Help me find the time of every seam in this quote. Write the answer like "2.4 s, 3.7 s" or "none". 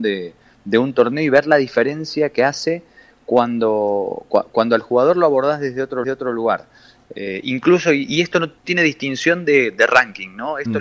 6.0 s, 8.6 s